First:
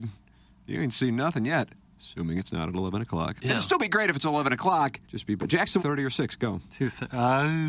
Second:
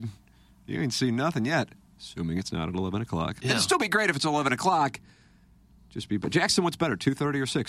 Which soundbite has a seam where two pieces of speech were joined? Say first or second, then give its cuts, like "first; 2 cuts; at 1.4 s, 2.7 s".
first; 2 cuts; at 5.0 s, 5.8 s